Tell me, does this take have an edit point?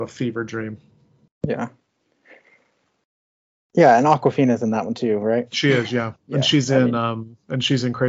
no; 0 cuts

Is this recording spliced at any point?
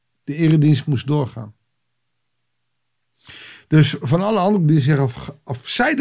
no; 0 cuts

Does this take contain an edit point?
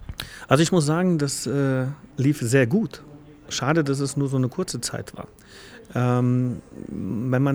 yes; 1 cut; at 2.1 s

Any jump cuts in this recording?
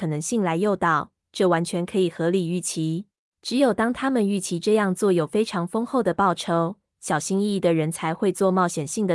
yes; 1 cut; at 3.2 s

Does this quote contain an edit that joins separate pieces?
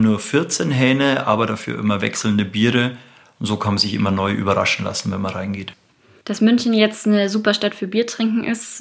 no; 0 cuts

